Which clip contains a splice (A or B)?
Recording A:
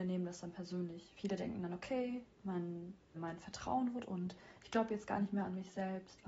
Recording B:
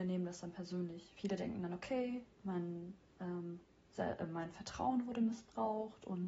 A